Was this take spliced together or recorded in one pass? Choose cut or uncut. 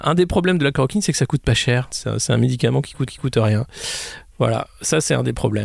cut